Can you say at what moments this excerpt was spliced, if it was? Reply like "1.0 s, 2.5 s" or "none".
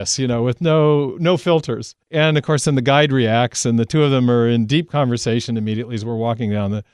2.0 s